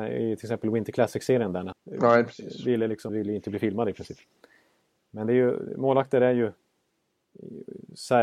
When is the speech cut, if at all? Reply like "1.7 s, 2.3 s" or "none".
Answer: 1.7 s, 3.1 s